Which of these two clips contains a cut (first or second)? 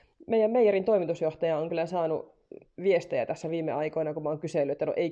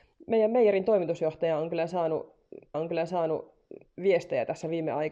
second